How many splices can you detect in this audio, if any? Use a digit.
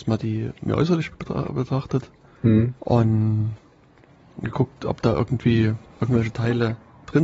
2